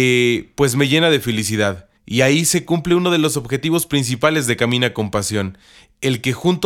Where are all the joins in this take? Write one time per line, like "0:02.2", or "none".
0:02.0